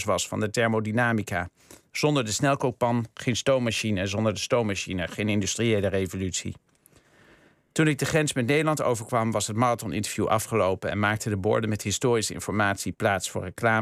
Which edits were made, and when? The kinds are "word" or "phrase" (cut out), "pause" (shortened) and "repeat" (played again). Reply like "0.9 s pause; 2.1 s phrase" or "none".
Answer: none